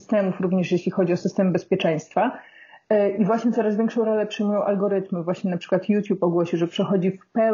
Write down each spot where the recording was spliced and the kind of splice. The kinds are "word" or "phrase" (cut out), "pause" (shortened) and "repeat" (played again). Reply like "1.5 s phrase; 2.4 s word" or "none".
none